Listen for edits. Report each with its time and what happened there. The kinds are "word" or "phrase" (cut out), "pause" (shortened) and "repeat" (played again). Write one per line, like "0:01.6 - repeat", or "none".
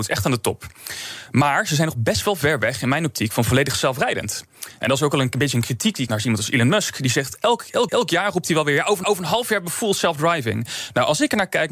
0:06.1 - word
0:07.9 - repeat
0:09.0 - repeat